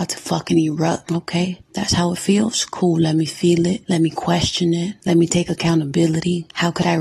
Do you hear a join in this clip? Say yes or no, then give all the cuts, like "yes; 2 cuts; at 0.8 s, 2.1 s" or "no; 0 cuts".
yes; 1 cut; at 1.6 s